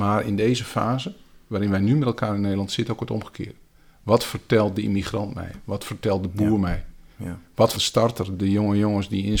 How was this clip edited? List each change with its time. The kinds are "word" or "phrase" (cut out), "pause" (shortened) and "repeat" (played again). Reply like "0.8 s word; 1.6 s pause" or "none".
7.7 s word